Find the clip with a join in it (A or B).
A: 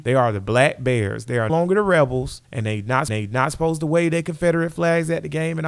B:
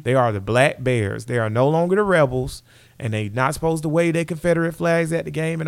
A